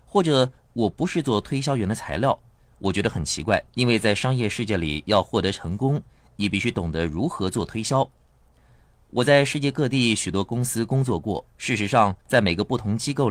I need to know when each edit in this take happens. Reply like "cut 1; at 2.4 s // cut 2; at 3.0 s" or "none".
cut 1; at 3.7 s // cut 2; at 11.5 s // cut 3; at 12.2 s